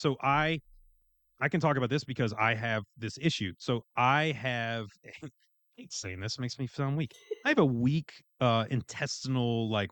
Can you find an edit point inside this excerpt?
no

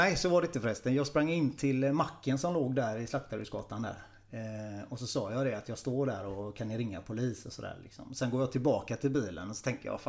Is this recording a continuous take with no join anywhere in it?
yes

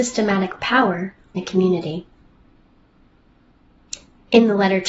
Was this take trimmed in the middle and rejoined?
yes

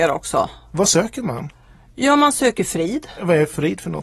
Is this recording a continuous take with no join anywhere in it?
yes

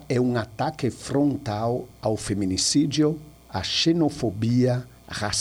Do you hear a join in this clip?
no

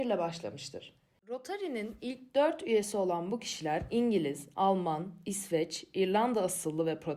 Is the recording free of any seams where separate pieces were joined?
yes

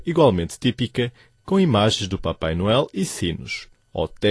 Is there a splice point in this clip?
no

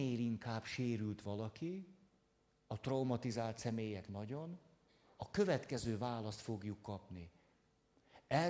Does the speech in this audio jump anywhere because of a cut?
no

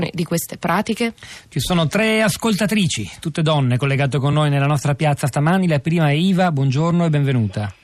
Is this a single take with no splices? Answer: yes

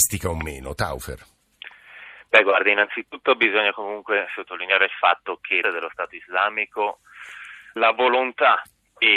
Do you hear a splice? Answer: yes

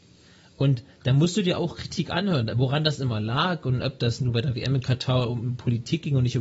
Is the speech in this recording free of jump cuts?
yes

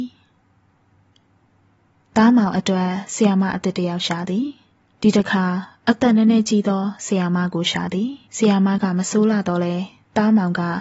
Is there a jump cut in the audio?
yes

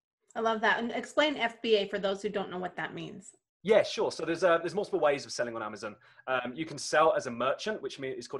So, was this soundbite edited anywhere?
no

